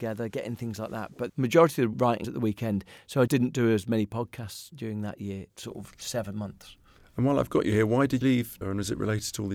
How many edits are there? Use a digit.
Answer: 8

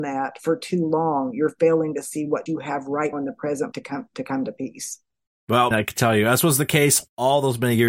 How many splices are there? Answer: 4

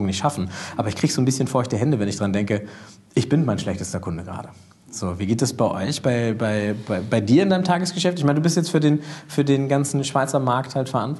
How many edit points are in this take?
0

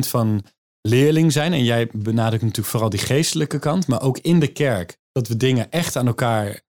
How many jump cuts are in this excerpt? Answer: 1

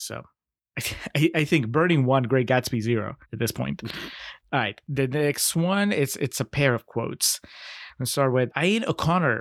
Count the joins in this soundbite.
3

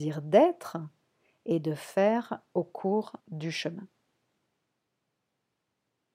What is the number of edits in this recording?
1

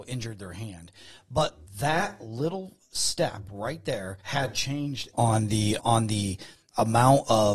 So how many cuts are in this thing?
4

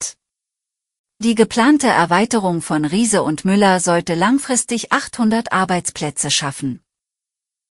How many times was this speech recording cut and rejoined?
0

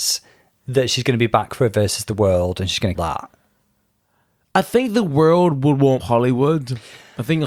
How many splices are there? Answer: 2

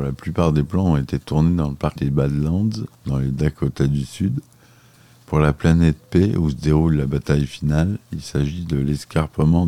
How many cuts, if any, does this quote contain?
2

